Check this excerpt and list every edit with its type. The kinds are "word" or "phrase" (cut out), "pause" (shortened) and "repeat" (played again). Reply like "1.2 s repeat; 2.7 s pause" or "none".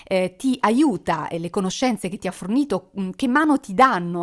none